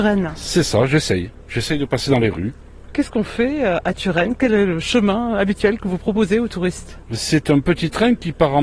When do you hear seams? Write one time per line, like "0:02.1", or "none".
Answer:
none